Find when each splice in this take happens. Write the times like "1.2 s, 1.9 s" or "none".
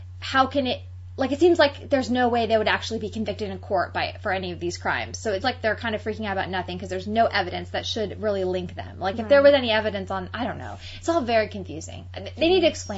5.4 s